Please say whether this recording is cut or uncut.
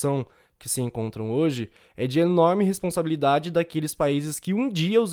uncut